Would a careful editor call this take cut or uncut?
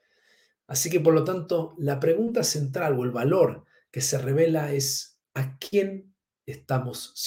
cut